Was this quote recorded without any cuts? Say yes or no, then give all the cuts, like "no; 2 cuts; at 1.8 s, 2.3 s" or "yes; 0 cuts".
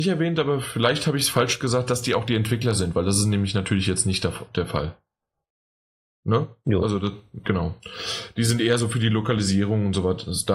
yes; 0 cuts